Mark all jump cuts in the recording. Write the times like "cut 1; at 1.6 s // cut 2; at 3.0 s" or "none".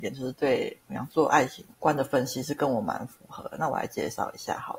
cut 1; at 1.7 s